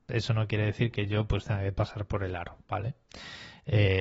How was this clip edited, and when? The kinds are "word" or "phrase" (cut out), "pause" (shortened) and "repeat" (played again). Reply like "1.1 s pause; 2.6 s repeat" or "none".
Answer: 2.6 s pause